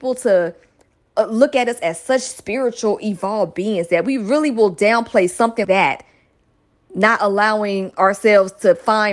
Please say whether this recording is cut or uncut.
cut